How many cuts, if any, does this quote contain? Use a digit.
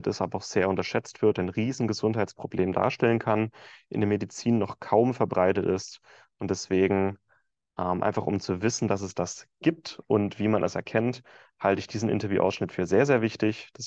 0